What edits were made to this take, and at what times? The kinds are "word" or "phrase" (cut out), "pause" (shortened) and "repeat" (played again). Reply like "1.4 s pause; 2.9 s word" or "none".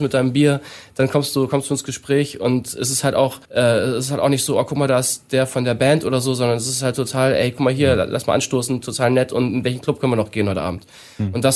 3.4 s pause